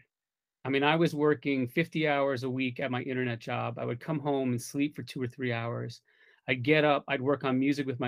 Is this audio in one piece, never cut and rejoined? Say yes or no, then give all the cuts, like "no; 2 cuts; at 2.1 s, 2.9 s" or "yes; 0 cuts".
yes; 0 cuts